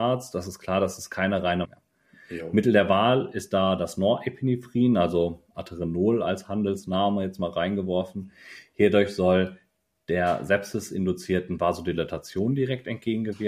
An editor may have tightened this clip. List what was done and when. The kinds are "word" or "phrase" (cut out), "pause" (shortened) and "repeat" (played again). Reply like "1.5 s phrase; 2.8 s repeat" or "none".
1.6 s phrase